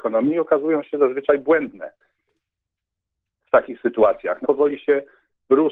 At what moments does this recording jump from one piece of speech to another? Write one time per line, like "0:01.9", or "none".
0:04.4

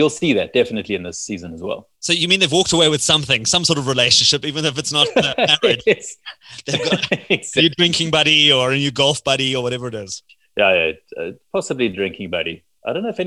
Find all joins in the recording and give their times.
0:01.9
0:10.3

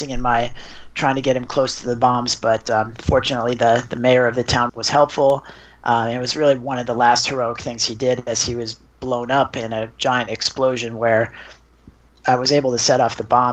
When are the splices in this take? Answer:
0:04.7

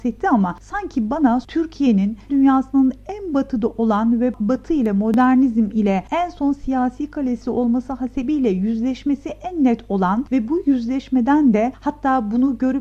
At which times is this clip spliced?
0:02.3

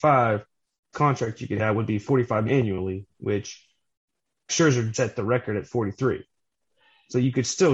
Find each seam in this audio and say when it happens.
0:00.9
0:01.6
0:02.5
0:04.5
0:04.9

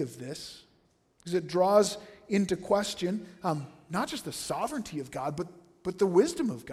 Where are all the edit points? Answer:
none

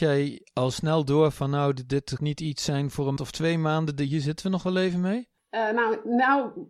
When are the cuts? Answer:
0:02.2
0:03.2

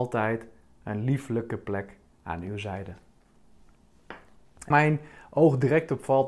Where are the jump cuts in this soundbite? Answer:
0:04.7

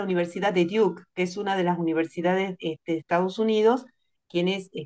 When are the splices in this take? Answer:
none

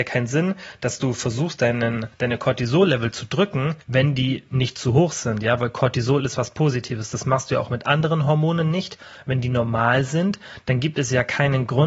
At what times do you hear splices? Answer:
0:02.1
0:03.8

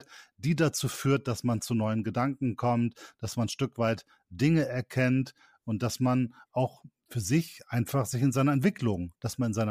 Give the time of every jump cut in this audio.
none

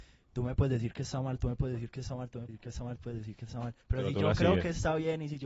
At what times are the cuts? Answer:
0:02.5
0:03.0
0:03.8

